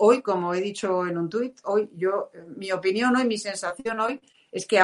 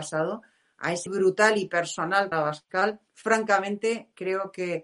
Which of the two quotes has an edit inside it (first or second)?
second